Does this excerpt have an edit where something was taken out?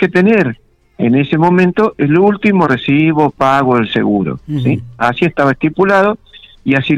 no; 0 cuts

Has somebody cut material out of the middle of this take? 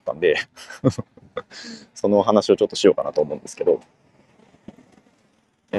no; 0 cuts

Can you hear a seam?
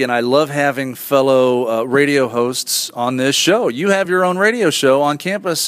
no; 0 cuts

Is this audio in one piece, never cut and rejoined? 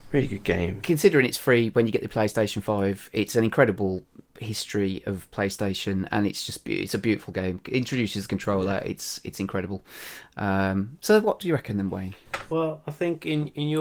yes; 0 cuts

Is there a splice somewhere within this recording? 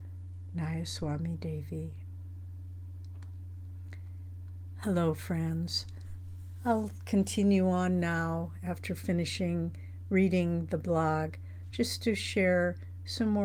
no; 0 cuts

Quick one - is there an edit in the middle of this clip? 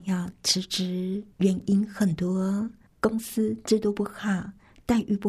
yes; 2 cuts; at 1.3 s, 2.9 s

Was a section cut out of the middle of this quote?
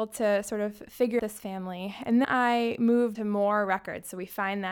yes; 3 cuts; at 1.2 s, 2.2 s, 3.1 s

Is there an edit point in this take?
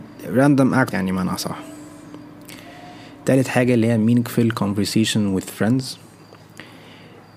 yes; 1 cut; at 0.9 s

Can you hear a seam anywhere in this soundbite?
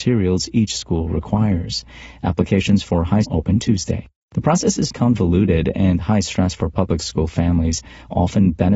yes; 2 cuts; at 3.2 s, 4.9 s

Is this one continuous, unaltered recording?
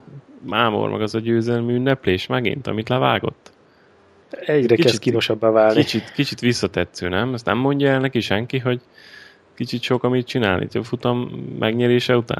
yes; 0 cuts

